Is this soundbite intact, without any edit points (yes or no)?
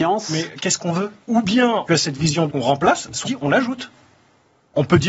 no